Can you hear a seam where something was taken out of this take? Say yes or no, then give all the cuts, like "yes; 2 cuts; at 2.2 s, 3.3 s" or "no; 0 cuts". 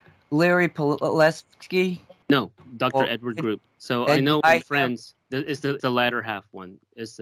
yes; 5 cuts; at 2.2 s, 3.7 s, 4.4 s, 5.2 s, 5.8 s